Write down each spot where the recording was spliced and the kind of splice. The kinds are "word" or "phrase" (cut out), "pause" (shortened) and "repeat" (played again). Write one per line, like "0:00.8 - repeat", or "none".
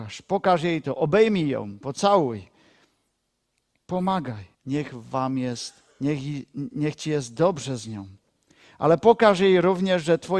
0:04.5 - pause
0:05.9 - pause